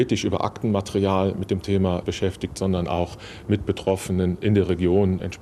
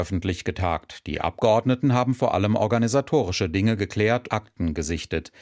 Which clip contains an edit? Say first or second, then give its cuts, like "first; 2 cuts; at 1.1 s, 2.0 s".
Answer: second; 1 cut; at 4.3 s